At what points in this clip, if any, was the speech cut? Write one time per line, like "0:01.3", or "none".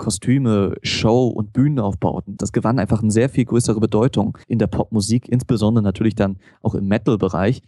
0:02.4
0:04.4